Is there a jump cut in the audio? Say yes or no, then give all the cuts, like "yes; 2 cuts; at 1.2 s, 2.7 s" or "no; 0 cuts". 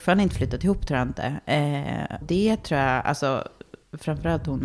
yes; 1 cut; at 2.2 s